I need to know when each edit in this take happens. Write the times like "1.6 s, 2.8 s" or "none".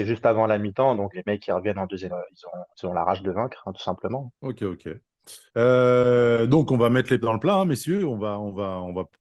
1.1 s, 2.1 s, 2.7 s, 4.4 s, 5.5 s, 7.2 s